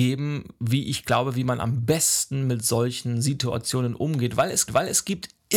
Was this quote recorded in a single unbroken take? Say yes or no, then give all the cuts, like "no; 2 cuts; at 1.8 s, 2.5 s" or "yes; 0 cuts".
no; 1 cut; at 4.7 s